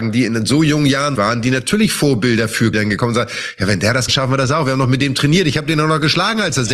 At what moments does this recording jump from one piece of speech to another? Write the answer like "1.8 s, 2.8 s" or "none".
1.2 s, 2.7 s, 4.1 s